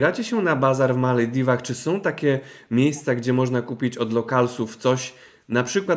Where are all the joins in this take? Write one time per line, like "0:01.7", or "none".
none